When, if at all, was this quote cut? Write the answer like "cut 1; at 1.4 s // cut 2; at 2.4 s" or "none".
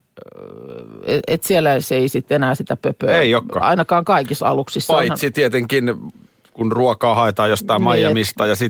none